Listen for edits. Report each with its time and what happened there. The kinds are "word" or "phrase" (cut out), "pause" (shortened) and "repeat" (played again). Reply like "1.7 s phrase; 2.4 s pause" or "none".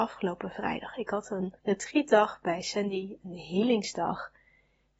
1.6 s pause